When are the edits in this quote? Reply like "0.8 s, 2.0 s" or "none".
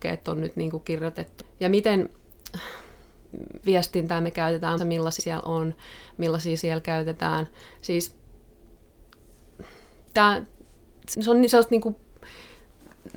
1.4 s, 3.6 s, 4.8 s, 5.2 s, 6.6 s, 11.1 s